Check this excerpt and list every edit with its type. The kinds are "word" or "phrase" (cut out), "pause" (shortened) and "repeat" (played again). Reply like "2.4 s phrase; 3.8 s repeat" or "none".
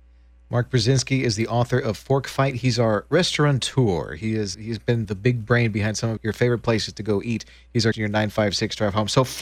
4.5 s word; 5.0 s word; 6.2 s word; 7.9 s word

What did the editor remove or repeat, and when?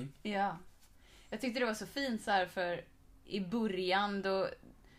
none

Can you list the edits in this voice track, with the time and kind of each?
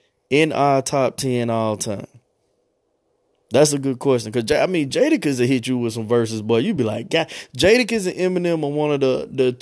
none

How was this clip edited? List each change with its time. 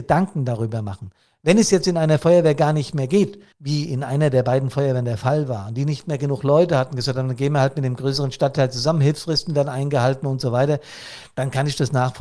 3.5 s pause

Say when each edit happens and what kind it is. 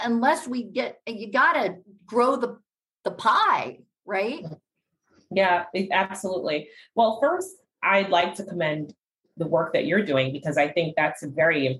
none

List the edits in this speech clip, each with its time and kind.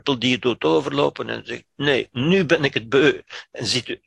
none

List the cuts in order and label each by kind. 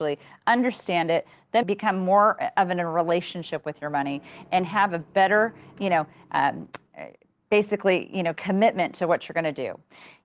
1.6 s word

